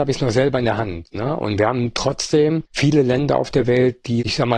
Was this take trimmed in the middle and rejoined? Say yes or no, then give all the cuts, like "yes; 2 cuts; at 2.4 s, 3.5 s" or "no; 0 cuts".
yes; 1 cut; at 2.7 s